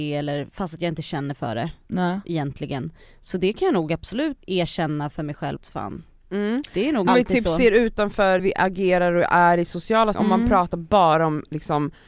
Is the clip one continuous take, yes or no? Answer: no